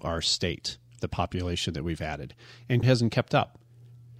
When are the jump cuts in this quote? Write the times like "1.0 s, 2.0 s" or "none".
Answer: 1.0 s, 2.8 s